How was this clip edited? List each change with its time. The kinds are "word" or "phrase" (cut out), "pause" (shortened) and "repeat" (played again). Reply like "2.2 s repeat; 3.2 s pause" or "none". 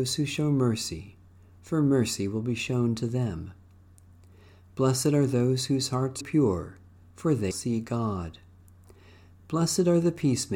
6.2 s word; 7.5 s word